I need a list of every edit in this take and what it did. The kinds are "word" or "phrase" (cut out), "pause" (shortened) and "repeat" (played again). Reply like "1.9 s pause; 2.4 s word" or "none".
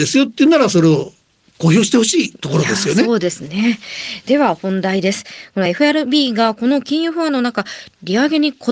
none